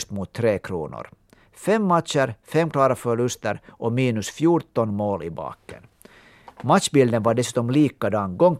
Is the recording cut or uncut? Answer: uncut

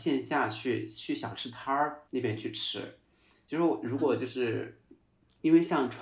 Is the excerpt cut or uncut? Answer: cut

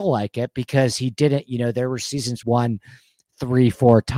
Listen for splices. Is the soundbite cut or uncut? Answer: cut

